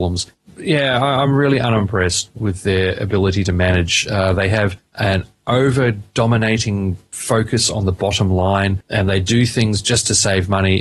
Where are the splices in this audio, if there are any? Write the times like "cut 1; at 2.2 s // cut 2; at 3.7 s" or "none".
none